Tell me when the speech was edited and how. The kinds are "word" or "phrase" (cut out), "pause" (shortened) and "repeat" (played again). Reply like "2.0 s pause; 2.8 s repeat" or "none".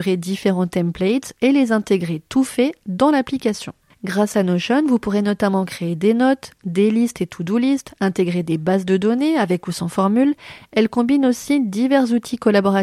none